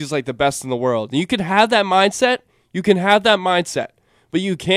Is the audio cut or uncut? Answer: uncut